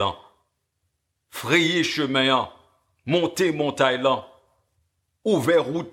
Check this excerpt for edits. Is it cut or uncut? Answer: uncut